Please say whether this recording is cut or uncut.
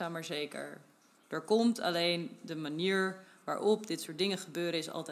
uncut